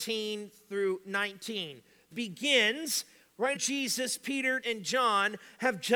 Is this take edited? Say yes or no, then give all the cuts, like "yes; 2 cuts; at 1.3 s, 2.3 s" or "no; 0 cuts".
yes; 3 cuts; at 2.1 s, 3.5 s, 4.6 s